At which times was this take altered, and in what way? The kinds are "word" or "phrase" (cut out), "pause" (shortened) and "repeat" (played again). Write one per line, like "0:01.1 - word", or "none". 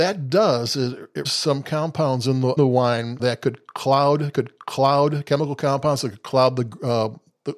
0:01.2 - word
0:02.6 - word
0:03.2 - word
0:04.3 - repeat

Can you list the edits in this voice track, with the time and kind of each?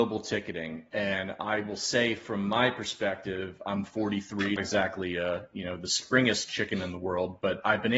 0:04.6 - phrase

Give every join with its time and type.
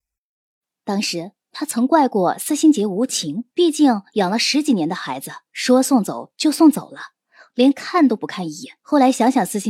0:03.5 - pause
0:05.5 - pause
0:08.8 - pause

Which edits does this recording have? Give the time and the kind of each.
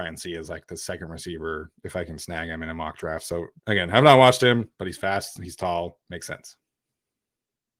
0:01.7 - pause
0:03.6 - pause
0:06.0 - pause

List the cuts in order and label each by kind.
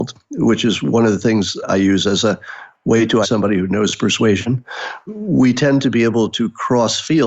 0:01.6 - word
0:03.2 - word
0:05.1 - word

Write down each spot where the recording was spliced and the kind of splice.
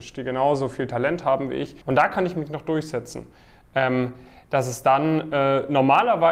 0:01.8 - pause

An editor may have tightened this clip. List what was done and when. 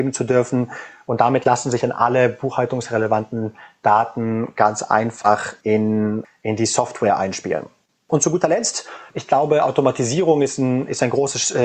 none

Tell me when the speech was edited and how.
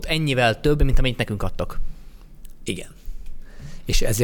none

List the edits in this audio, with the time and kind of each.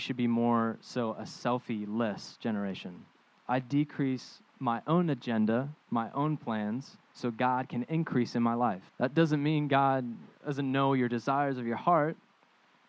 0:03.1 - pause
0:04.5 - pause
0:07.0 - pause
0:08.9 - pause
0:10.3 - pause

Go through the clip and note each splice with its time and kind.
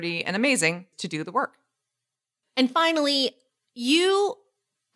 0:00.9 - phrase
0:02.2 - pause

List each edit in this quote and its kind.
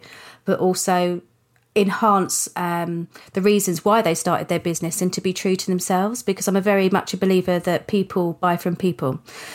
none

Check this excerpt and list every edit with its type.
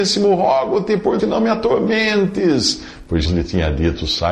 0:01.2 - word
0:03.3 - word

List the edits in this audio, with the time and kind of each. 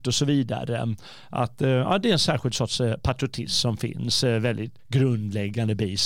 0:04.8 - pause

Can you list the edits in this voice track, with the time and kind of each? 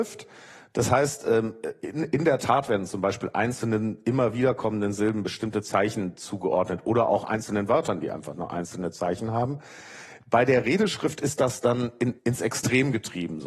0:12.2 - pause

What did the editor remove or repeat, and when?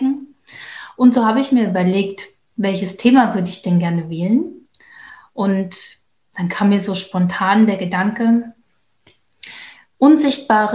none

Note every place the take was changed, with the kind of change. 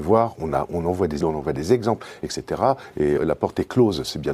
0:01.2 - word
0:03.2 - word

